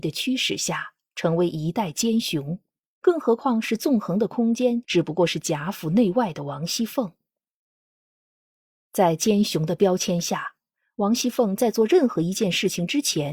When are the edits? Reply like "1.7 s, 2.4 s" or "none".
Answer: none